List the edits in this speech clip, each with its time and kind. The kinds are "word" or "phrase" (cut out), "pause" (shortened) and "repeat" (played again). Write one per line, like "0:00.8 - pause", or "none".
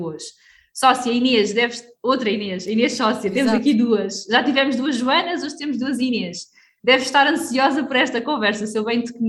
none